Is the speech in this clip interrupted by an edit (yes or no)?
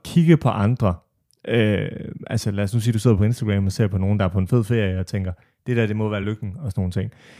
no